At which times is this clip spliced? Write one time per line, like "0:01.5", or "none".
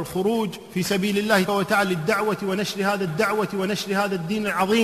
0:01.5
0:03.1